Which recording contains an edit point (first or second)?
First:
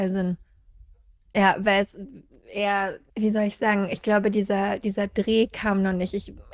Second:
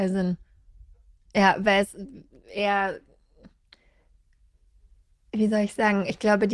first